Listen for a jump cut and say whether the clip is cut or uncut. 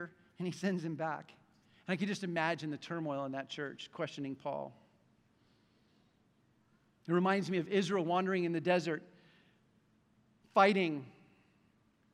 uncut